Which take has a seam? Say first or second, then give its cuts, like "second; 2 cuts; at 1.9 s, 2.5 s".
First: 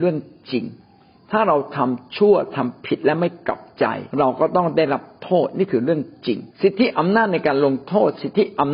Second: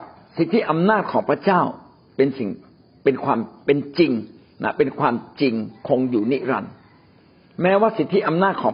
first; 2 cuts; at 4.1 s, 6.5 s